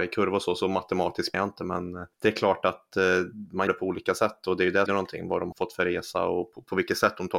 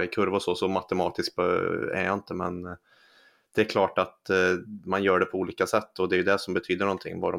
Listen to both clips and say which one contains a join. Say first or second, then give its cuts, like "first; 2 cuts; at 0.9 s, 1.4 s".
first; 5 cuts; at 1.3 s, 2.1 s, 3.7 s, 4.9 s, 5.5 s